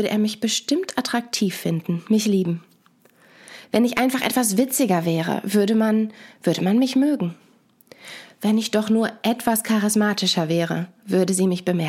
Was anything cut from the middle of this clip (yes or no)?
no